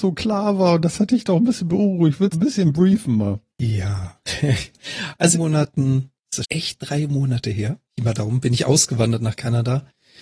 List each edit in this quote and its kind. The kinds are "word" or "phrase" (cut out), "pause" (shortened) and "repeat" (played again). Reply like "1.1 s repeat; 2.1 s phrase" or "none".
2.3 s phrase; 3.5 s pause; 5.3 s phrase; 6.4 s word; 7.9 s pause